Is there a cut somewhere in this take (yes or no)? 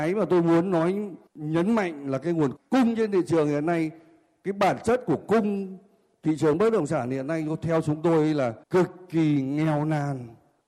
yes